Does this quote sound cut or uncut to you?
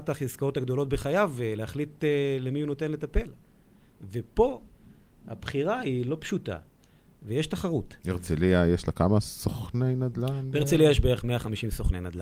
cut